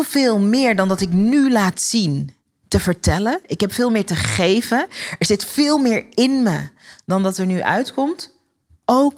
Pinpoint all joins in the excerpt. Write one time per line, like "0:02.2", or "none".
none